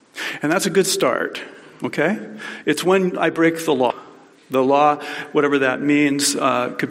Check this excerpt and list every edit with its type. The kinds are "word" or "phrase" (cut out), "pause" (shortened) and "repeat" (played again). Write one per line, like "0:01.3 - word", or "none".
none